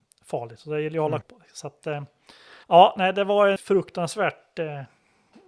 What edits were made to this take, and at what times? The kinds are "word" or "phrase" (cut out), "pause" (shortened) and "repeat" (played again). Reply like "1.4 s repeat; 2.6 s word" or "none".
1.2 s word; 2.6 s pause; 3.6 s word